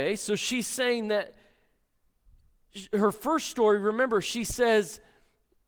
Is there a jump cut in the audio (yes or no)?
no